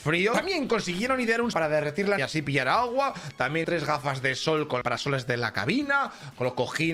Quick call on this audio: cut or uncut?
cut